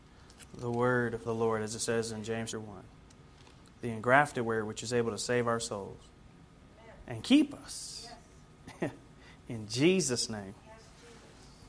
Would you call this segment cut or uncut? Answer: cut